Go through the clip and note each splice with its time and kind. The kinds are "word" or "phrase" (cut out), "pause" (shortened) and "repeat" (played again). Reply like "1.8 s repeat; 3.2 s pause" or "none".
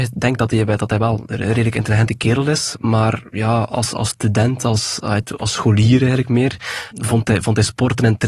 6.9 s word

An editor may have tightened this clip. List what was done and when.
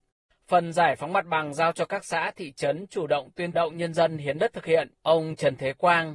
3.5 s phrase; 5.0 s pause

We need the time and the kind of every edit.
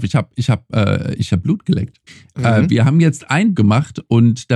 1.3 s phrase; 2.1 s pause; 3.5 s word

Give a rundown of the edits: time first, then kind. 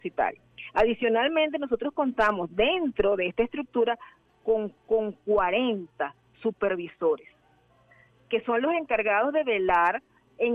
4.8 s repeat

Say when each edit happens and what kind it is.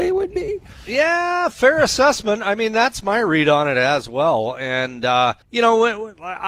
5.4 s pause

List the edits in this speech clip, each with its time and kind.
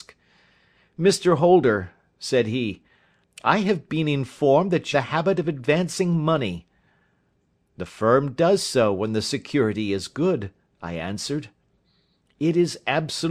4.9 s phrase

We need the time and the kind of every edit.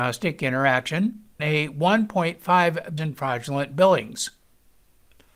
1.4 s phrase; 3.0 s word

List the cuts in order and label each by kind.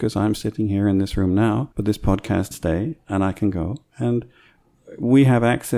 1.7 s pause; 2.5 s word

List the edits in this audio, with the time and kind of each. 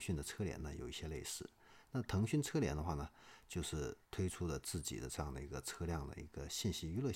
4.0 s pause

